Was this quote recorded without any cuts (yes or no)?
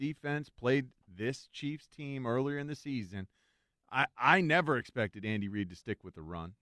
yes